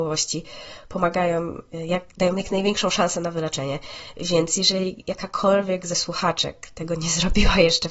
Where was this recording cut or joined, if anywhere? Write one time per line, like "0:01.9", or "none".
none